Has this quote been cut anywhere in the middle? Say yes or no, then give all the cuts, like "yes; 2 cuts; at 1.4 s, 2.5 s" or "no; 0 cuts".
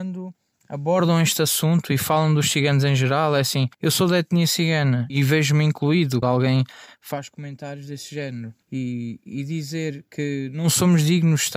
yes; 4 cuts; at 3.7 s, 5.1 s, 6.2 s, 8.6 s